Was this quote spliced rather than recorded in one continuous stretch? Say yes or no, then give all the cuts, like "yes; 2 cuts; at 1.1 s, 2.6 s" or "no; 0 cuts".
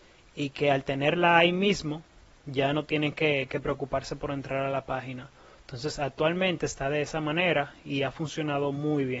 no; 0 cuts